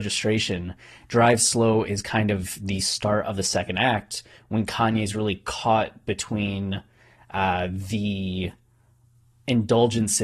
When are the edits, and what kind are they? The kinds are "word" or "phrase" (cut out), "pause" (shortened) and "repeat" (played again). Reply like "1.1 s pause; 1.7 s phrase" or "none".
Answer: none